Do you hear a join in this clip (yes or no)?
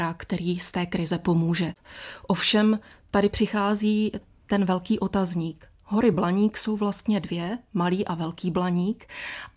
no